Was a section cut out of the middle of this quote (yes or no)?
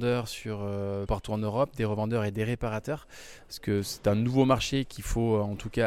yes